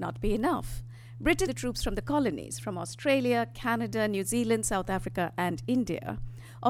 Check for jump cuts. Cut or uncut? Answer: cut